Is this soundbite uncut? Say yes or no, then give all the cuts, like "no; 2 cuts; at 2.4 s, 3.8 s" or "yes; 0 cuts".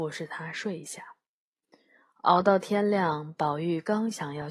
yes; 0 cuts